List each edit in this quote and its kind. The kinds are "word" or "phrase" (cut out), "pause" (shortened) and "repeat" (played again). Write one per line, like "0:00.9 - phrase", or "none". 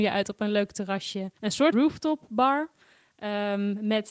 0:01.4 - pause
0:01.7 - word

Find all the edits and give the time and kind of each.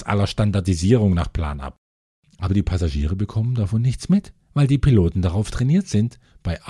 none

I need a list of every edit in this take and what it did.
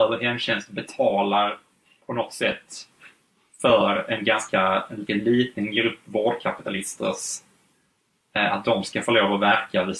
0:05.1 - word

